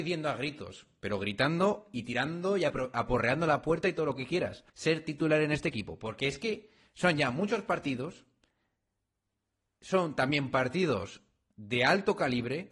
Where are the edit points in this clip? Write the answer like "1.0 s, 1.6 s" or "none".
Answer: 4.7 s